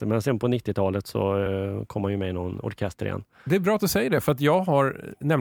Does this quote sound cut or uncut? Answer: uncut